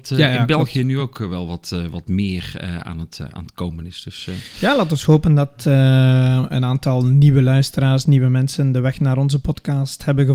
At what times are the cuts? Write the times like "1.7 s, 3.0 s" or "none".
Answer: none